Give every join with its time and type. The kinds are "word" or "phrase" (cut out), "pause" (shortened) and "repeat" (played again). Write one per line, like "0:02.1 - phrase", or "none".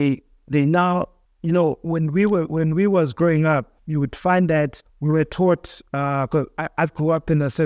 0:01.2 - pause
0:03.8 - pause
0:04.9 - pause